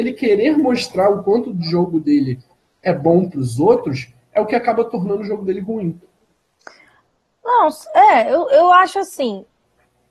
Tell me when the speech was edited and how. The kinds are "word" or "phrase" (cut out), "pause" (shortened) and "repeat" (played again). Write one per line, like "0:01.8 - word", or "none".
none